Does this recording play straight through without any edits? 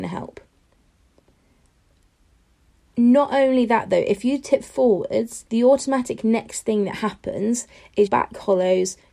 no; 2 cuts; at 5.5 s, 8.1 s

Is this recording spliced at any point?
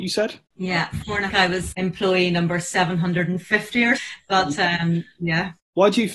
yes; 3 cuts; at 1.3 s, 1.7 s, 4.0 s

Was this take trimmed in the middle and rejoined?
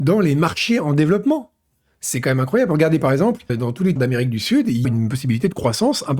yes; 3 cuts; at 3.5 s, 4.0 s, 4.8 s

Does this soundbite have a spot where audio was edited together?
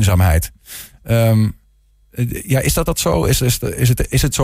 yes; 1 cut; at 2.9 s

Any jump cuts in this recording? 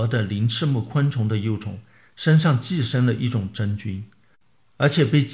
no; 0 cuts

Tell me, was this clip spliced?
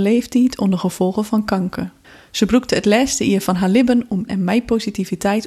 yes; 2 cuts; at 2.0 s, 4.3 s

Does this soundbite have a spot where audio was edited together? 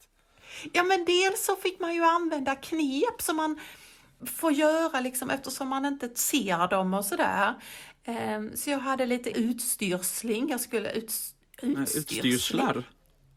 yes; 1 cut; at 9.3 s

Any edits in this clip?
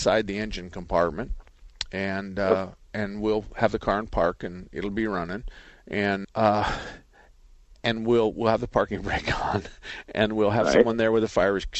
yes; 1 cut; at 6.2 s

